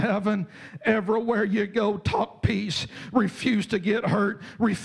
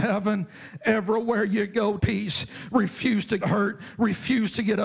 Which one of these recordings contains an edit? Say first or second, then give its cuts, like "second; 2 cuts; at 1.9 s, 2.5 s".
second; 2 cuts; at 2.0 s, 3.4 s